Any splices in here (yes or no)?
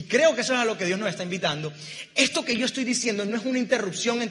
no